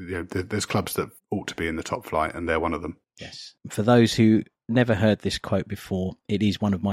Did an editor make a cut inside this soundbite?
no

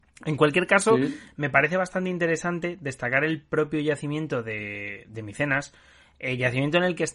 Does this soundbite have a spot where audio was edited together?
no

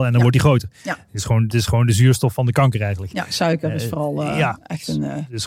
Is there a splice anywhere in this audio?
yes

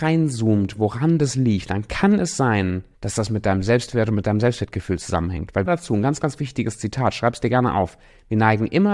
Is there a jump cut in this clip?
yes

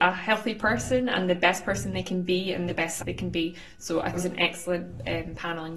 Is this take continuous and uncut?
no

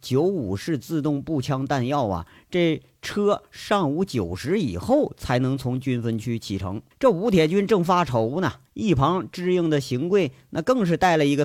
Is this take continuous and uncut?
no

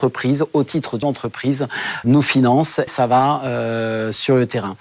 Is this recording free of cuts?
no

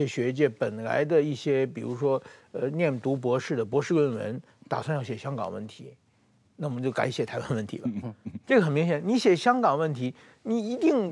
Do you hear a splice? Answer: no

